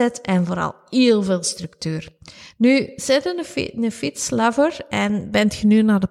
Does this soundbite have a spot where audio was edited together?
no; 0 cuts

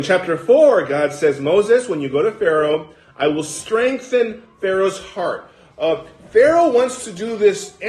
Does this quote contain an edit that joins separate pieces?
no; 0 cuts

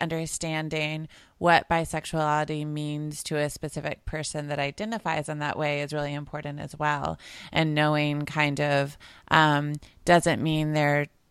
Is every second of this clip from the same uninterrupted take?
yes; 0 cuts

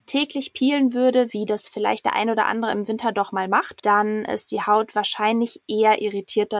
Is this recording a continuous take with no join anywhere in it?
yes; 0 cuts

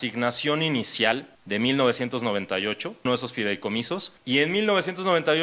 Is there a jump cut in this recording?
yes; 3 cuts; at 1.3 s, 3.1 s, 4.2 s

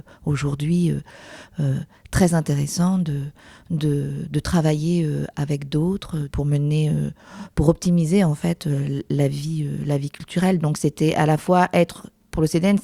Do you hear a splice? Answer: no; 0 cuts

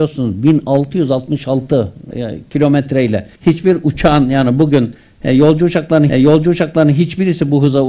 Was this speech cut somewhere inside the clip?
yes; 3 cuts; at 2.1 s, 3.4 s, 6.1 s

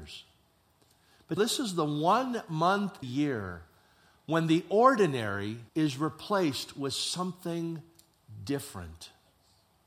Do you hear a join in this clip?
yes; 3 cuts; at 1.4 s, 3.0 s, 5.7 s

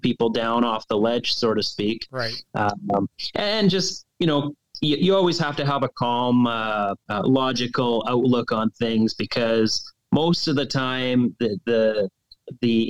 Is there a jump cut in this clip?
yes; 1 cut; at 7.0 s

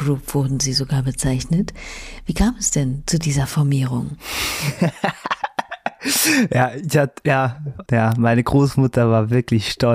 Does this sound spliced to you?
yes; 1 cut; at 7.9 s

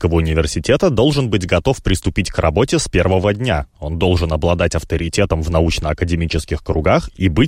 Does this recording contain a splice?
no; 0 cuts

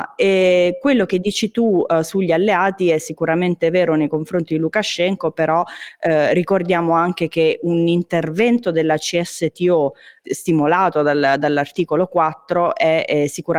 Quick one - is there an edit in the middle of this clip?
no; 0 cuts

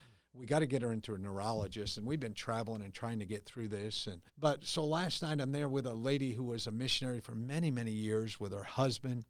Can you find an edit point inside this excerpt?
yes; 1 cut; at 4.3 s

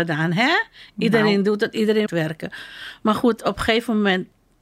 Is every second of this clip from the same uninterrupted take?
no; 1 cut; at 2.1 s

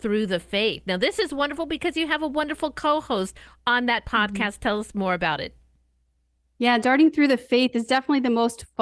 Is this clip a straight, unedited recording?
yes; 0 cuts

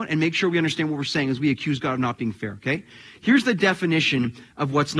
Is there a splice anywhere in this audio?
no; 0 cuts

